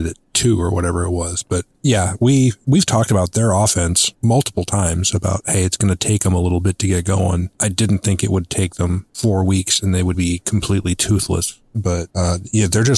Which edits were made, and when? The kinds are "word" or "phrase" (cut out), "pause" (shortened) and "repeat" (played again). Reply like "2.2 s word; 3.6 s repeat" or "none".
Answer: 10.1 s word